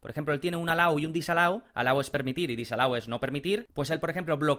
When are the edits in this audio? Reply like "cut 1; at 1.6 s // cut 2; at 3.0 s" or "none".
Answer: none